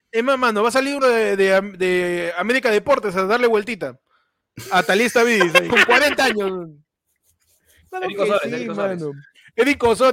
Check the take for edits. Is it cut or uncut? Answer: cut